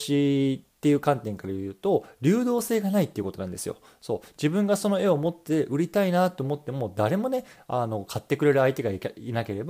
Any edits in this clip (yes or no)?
no